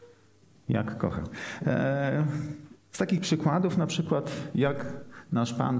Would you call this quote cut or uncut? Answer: uncut